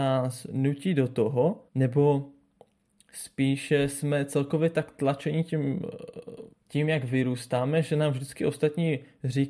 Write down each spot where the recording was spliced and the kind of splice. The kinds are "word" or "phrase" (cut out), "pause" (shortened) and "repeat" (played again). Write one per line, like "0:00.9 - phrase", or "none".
0:01.7 - pause
0:06.5 - pause